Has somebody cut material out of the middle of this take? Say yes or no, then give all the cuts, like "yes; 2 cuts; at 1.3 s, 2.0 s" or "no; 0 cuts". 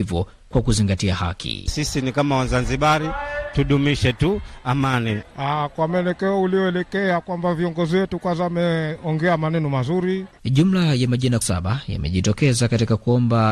yes; 1 cut; at 11.4 s